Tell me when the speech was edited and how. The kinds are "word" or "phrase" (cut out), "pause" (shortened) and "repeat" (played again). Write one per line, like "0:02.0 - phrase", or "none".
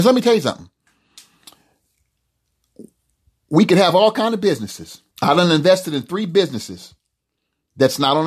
0:05.1 - pause